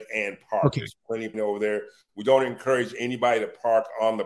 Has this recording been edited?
yes; 1 cut; at 1.3 s

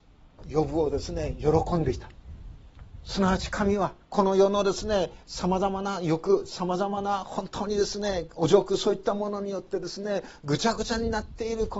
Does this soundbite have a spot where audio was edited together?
yes; 1 cut; at 4.0 s

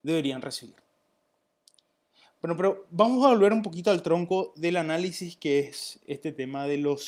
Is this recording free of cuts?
yes; 0 cuts

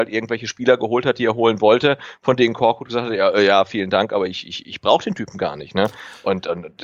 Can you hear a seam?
no; 0 cuts

